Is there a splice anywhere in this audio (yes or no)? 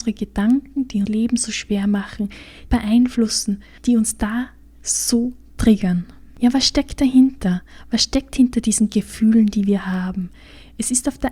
yes